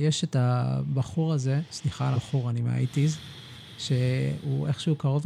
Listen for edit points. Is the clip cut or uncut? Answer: cut